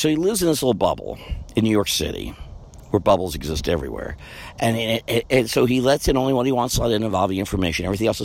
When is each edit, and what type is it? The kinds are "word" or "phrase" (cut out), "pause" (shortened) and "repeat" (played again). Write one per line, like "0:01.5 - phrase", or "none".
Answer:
none